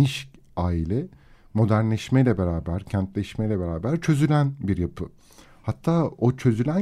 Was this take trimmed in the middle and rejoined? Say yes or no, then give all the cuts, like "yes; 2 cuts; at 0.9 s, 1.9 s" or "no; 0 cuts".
no; 0 cuts